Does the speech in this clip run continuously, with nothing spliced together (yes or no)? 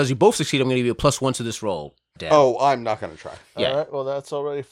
no